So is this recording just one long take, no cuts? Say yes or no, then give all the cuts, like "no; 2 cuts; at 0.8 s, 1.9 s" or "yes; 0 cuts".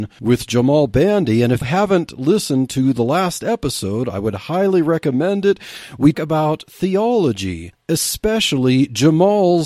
no; 2 cuts; at 1.6 s, 6.1 s